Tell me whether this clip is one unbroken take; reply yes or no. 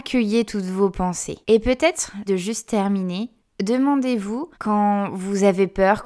no